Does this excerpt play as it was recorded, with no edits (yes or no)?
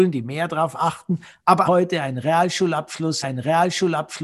no